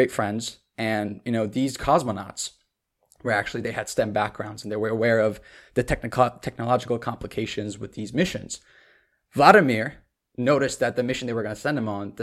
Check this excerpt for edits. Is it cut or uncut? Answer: uncut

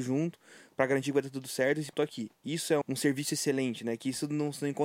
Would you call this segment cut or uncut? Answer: cut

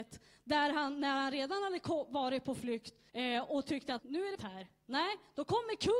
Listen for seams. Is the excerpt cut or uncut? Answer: cut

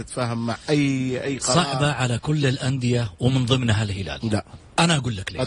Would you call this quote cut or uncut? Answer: cut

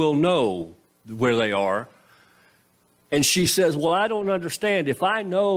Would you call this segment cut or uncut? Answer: uncut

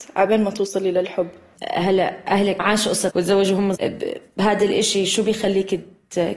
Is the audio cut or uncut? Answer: cut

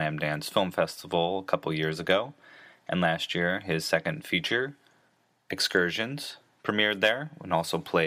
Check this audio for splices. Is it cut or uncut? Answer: uncut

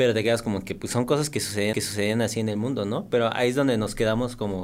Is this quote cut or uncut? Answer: cut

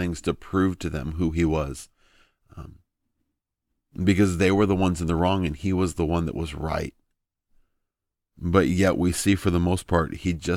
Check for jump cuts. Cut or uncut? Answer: uncut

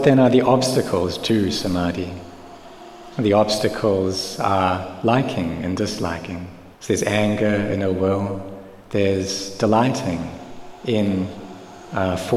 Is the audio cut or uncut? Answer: cut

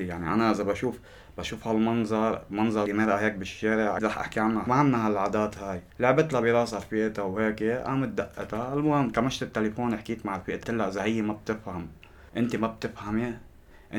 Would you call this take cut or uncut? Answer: cut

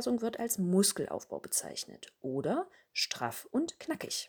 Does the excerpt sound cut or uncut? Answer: uncut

